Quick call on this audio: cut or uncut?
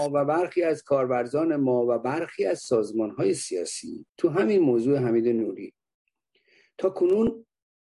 cut